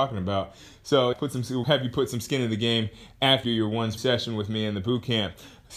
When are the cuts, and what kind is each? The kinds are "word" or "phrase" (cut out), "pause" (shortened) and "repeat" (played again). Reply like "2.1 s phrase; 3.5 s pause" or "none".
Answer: 1.1 s word; 1.6 s word; 3.4 s word; 4.0 s word